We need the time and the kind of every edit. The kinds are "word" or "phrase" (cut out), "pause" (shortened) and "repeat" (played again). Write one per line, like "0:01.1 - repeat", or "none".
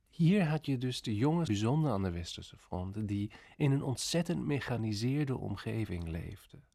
0:01.5 - word